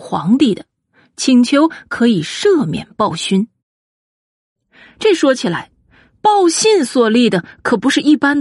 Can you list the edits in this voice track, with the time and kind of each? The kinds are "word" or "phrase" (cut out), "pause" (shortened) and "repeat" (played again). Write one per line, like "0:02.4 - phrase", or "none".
none